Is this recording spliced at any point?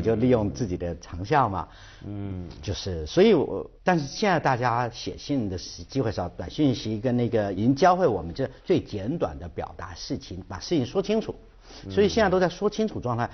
yes; 3 cuts; at 3.8 s, 7.5 s, 8.6 s

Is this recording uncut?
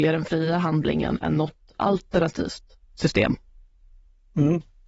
yes; 0 cuts

